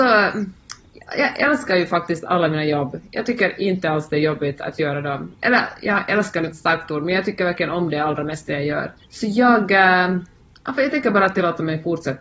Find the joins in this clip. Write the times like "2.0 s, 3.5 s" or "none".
6.5 s, 9.0 s